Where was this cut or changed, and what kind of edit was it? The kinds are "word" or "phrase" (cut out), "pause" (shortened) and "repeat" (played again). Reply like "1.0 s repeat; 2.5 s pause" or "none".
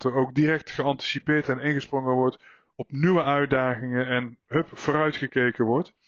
none

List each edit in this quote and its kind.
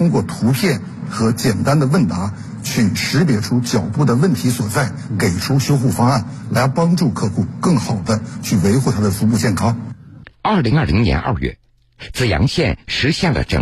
10.3 s pause

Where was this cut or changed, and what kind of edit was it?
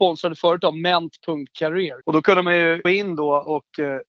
2.0 s pause; 2.8 s word

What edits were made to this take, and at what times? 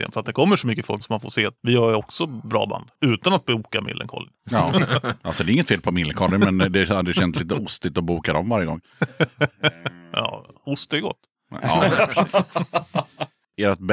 1.0 s word; 1.6 s pause

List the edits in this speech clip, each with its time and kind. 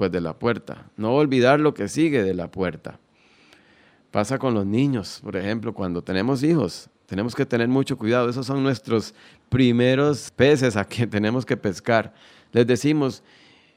none

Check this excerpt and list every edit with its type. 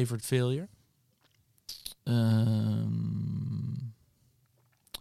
2.0 s pause

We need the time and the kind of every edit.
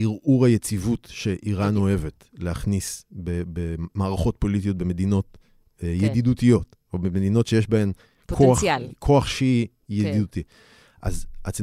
none

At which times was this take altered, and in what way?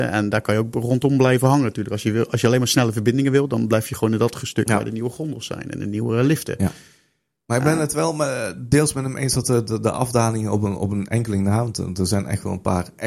none

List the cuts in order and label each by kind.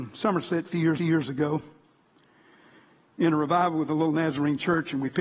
1.0 s repeat

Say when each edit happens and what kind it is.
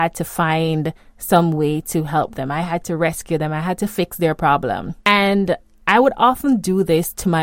5.0 s pause

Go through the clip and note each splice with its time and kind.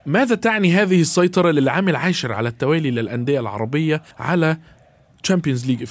4.1 s pause

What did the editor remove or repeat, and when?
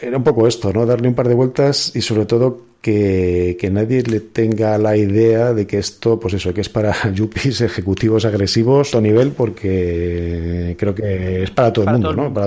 8.9 s phrase

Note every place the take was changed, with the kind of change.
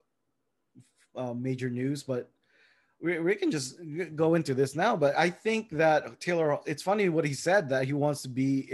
none

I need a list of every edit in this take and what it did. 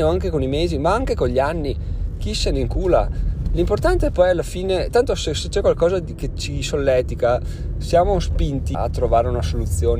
6.3 s word; 8.7 s word

